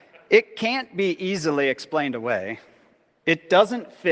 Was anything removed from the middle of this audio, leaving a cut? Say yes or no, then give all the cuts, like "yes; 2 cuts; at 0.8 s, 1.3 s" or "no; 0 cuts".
no; 0 cuts